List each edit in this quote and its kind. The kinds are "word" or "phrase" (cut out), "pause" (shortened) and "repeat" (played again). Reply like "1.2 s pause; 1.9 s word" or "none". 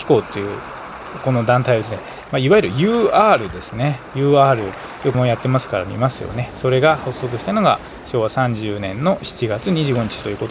5.1 s word